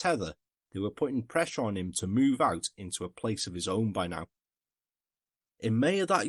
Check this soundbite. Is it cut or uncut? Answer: uncut